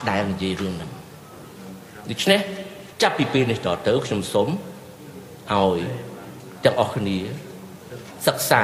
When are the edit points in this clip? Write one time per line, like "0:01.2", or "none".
0:02.9